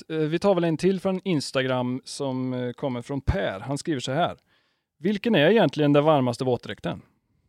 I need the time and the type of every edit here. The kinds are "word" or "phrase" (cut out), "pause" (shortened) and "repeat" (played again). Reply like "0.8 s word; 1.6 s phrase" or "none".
none